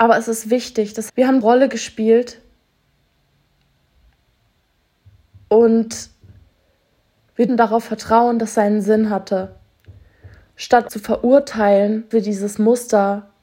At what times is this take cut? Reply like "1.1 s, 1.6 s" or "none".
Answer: 1.1 s, 1.4 s, 7.5 s, 8.5 s, 10.9 s, 12.1 s